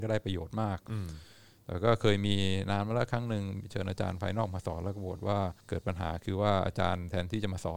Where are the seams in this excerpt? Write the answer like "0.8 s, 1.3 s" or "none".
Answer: 5.6 s